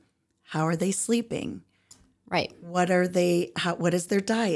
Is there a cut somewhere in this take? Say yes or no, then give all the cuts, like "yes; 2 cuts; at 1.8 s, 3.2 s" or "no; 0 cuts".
no; 0 cuts